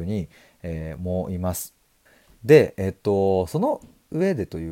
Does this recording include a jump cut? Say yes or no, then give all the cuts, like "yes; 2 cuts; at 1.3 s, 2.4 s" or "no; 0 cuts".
yes; 1 cut; at 2.1 s